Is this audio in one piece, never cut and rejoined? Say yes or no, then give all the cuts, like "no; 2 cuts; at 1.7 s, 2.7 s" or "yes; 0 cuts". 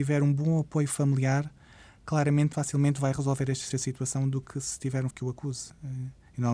no; 3 cuts; at 2.5 s, 3.7 s, 5.1 s